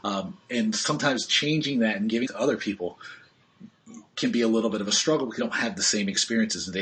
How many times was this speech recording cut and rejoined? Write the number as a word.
two